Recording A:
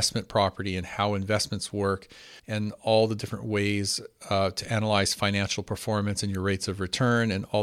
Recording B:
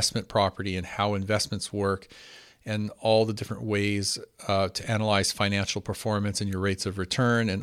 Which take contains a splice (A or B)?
A